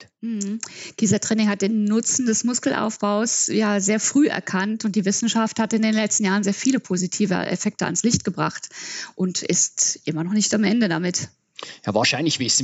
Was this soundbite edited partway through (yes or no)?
no